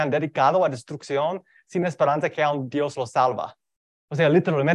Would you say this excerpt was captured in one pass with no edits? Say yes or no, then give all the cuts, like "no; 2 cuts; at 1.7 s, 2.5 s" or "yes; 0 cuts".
yes; 0 cuts